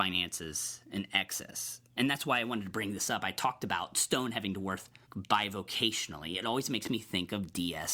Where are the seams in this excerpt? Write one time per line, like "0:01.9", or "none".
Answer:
0:05.0